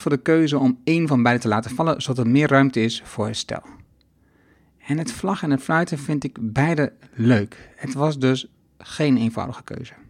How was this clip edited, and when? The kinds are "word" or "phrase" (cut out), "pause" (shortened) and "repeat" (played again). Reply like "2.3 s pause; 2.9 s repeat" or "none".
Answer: none